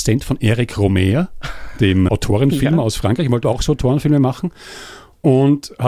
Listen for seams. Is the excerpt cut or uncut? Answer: cut